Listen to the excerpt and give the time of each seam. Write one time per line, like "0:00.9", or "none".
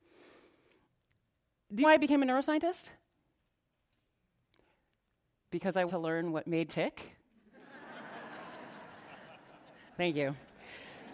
0:01.8
0:05.9
0:06.7